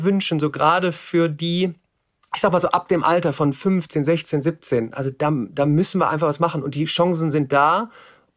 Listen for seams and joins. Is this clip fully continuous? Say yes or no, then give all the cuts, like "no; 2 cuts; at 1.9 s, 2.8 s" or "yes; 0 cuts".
yes; 0 cuts